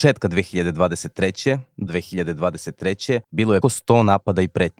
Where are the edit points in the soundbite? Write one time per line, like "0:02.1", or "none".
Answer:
0:01.9
0:03.2
0:03.6